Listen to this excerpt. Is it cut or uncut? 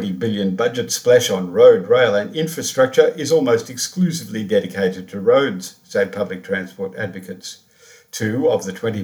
uncut